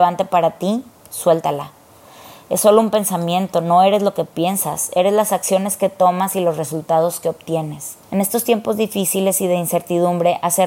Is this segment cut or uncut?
cut